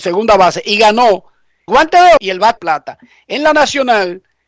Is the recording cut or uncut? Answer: cut